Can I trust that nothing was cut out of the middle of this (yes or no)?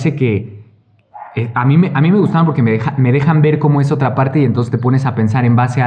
yes